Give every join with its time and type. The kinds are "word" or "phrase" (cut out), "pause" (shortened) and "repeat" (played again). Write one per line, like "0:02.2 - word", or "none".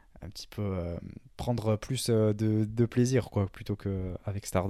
none